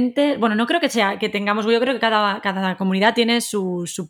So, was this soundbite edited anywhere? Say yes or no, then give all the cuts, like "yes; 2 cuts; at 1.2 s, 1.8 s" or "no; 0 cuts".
no; 0 cuts